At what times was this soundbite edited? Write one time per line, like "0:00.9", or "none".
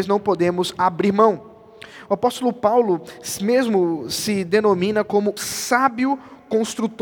0:05.4

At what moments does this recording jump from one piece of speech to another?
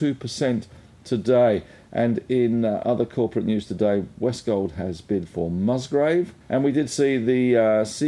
0:06.4

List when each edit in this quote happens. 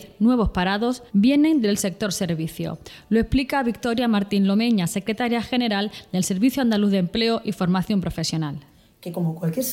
0:01.1

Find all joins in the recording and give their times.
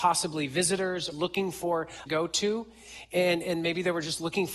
0:01.1
0:02.1

